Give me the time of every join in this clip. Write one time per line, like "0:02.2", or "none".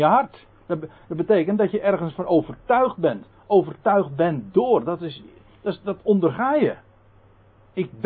none